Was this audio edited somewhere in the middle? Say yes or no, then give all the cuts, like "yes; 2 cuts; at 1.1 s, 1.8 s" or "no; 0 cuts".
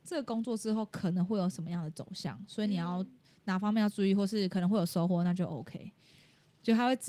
no; 0 cuts